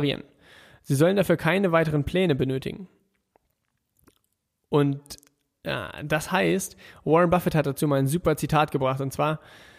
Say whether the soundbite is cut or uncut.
uncut